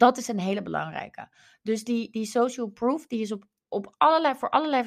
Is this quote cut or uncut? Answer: uncut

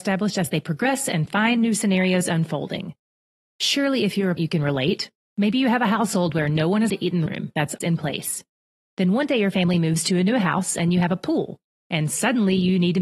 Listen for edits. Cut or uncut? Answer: cut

